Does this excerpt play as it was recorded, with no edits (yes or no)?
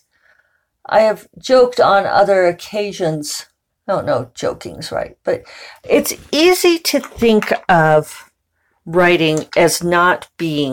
no